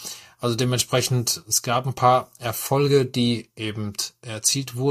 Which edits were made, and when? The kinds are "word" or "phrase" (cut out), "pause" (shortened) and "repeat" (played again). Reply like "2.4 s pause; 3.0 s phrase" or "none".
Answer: none